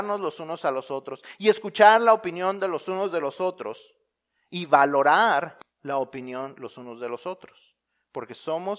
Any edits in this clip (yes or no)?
no